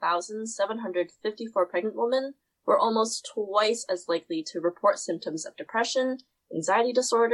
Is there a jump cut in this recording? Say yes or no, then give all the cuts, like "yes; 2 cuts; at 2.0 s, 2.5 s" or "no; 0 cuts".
no; 0 cuts